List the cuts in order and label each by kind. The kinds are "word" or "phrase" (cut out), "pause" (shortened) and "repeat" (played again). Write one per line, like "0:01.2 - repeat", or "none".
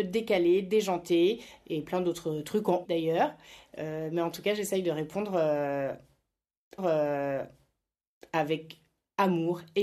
0:02.8 - word
0:06.8 - repeat